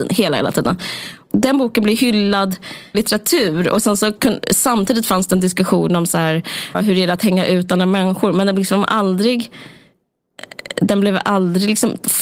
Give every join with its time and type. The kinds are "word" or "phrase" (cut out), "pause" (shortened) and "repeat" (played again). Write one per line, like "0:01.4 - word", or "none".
0:02.9 - word
0:06.7 - word

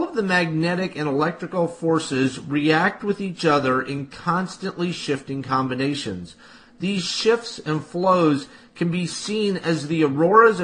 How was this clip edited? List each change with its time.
none

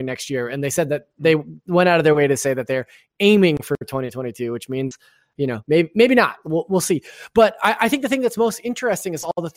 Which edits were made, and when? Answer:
none

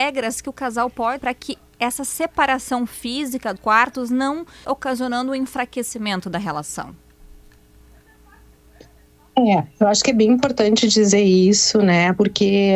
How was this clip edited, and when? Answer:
0:01.2 - word
0:03.6 - word
0:04.6 - word

